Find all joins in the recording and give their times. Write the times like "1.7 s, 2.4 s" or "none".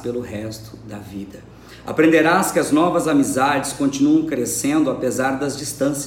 none

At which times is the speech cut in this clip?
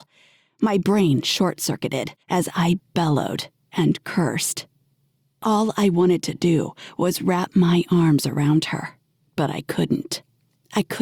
2.2 s

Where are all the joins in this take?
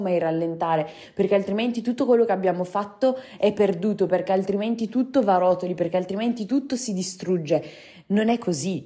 none

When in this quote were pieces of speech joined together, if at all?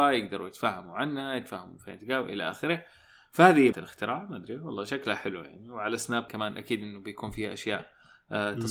3.7 s, 6.3 s

